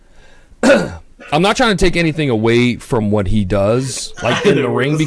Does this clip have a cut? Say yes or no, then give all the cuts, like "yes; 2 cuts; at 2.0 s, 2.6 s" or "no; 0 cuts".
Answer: no; 0 cuts